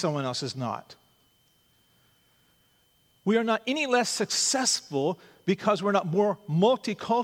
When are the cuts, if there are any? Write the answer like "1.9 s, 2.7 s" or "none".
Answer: none